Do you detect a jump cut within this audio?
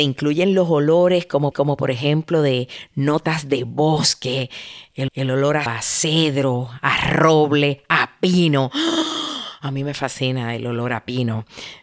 yes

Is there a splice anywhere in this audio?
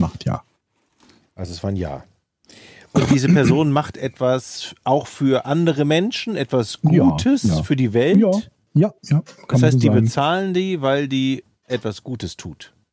yes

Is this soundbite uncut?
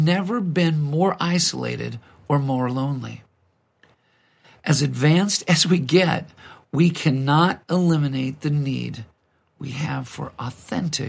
yes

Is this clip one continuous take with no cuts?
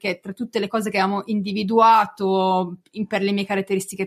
yes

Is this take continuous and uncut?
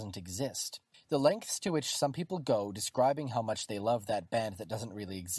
no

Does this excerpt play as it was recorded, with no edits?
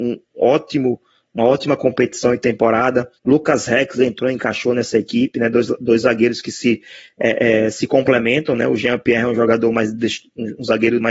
no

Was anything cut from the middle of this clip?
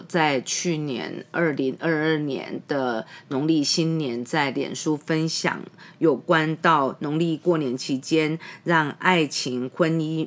no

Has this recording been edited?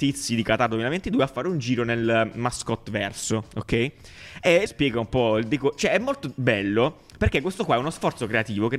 yes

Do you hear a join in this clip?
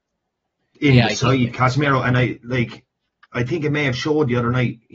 no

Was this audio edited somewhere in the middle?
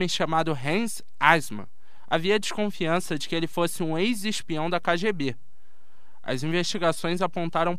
no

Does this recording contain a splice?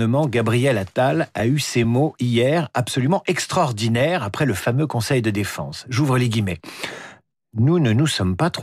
no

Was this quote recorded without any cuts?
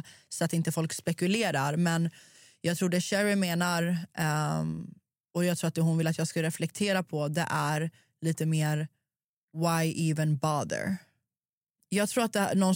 yes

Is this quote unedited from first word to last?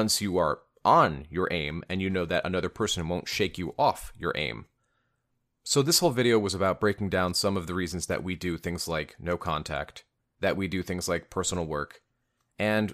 yes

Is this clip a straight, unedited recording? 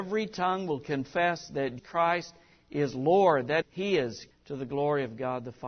no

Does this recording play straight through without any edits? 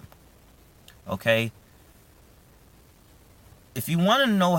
yes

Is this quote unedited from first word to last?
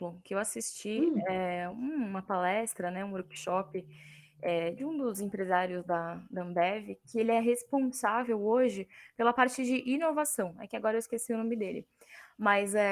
yes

